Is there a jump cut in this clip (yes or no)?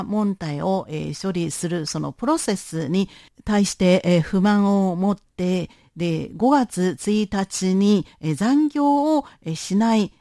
no